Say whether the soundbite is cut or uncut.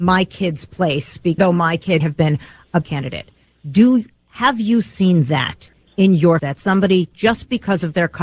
cut